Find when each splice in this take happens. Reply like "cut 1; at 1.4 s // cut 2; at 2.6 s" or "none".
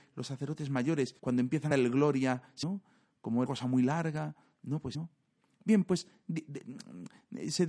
cut 1; at 1.2 s // cut 2; at 1.7 s // cut 3; at 2.6 s // cut 4; at 3.5 s // cut 5; at 4.9 s